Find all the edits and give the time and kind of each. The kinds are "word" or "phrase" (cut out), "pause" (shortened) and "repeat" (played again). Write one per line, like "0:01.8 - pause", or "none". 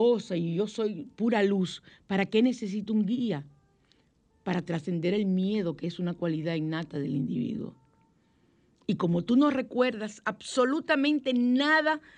none